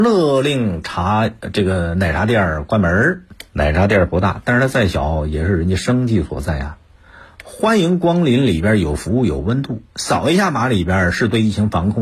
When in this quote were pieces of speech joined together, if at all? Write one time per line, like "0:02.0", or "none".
0:03.5